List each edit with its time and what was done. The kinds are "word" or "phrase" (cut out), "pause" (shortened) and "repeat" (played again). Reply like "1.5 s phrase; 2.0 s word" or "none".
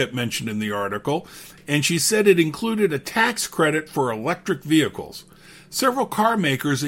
none